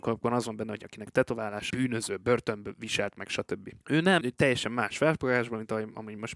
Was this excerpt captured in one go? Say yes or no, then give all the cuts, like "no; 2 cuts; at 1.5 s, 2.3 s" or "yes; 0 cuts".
no; 3 cuts; at 1.7 s, 3.8 s, 4.2 s